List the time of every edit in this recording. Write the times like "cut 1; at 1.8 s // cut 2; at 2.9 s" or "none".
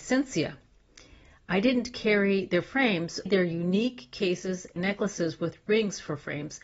cut 1; at 3.3 s // cut 2; at 4.8 s